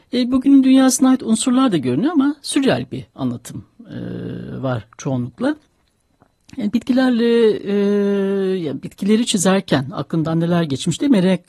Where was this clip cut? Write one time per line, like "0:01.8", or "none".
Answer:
none